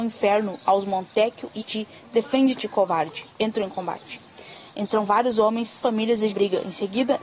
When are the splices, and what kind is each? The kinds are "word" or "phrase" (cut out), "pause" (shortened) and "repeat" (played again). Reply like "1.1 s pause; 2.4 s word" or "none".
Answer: 1.6 s word; 5.8 s phrase; 6.3 s phrase